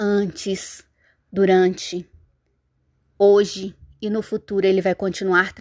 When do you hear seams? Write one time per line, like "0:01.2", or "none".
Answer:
none